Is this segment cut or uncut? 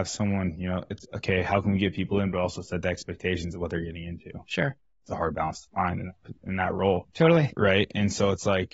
uncut